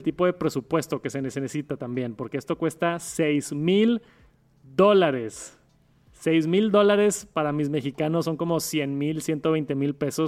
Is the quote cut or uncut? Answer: uncut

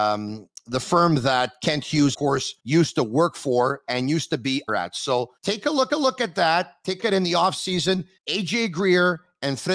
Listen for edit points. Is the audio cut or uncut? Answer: cut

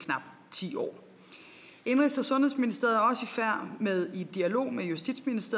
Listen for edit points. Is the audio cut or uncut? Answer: uncut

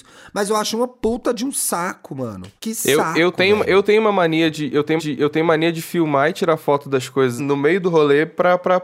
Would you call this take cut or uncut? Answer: cut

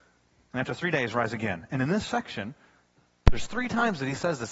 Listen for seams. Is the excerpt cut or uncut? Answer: uncut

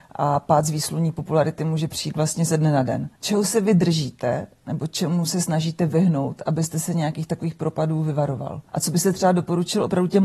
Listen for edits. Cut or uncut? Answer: cut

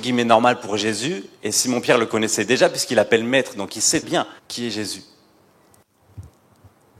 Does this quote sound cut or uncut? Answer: cut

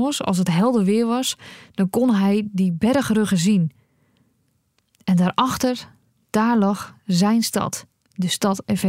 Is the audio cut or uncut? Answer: uncut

